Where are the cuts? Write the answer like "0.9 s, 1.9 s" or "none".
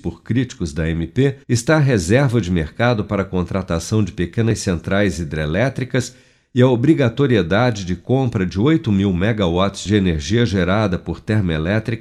1.4 s